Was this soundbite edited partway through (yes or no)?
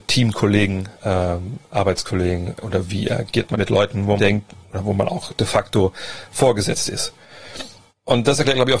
yes